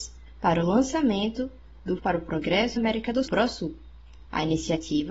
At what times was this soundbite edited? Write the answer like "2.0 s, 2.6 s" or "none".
2.0 s, 2.8 s, 3.3 s

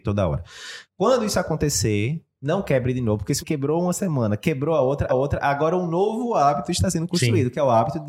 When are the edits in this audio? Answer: 3.4 s, 5.1 s

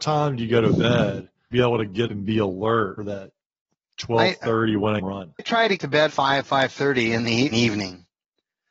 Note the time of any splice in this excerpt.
1.5 s, 2.1 s, 3.0 s, 5.0 s, 5.4 s, 5.8 s, 6.1 s, 7.5 s

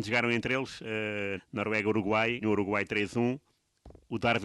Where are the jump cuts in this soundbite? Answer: 1.4 s, 2.4 s

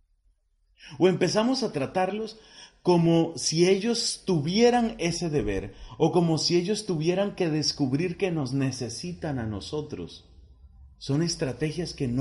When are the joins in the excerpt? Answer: 10.9 s

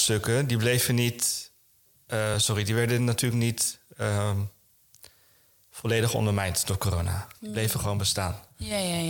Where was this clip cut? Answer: none

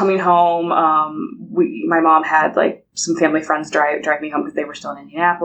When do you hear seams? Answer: 2.9 s

